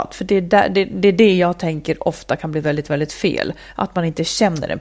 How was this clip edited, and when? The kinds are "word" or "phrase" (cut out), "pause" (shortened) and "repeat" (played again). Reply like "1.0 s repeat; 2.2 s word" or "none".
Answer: none